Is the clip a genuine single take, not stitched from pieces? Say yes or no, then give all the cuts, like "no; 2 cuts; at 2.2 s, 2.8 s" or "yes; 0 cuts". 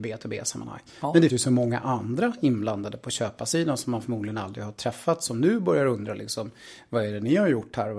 no; 1 cut; at 1.3 s